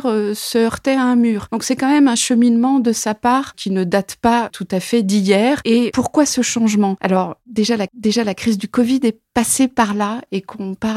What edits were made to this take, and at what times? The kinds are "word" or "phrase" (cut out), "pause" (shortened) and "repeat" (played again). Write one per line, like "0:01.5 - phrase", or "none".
0:07.9 - repeat